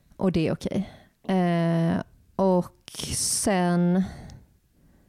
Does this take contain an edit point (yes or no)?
no